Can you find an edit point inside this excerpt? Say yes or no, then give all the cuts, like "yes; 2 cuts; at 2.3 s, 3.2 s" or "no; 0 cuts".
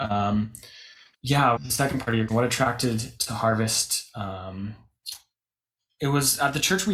yes; 4 cuts; at 1.1 s, 1.6 s, 2.3 s, 3.2 s